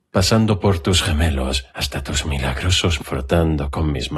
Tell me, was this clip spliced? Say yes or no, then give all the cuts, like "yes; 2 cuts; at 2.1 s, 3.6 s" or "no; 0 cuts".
yes; 2 cuts; at 1.7 s, 3.0 s